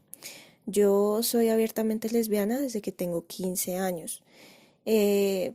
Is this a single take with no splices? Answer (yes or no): yes